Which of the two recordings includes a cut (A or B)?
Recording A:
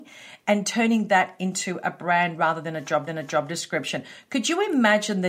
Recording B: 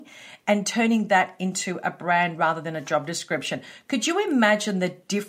A